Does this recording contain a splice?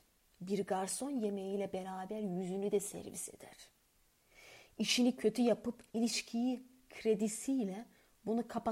yes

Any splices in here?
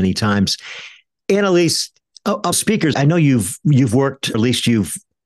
yes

